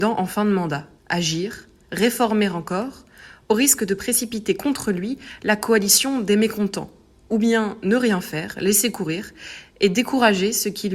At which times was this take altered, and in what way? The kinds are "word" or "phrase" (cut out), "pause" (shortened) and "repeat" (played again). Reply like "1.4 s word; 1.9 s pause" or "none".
1.0 s pause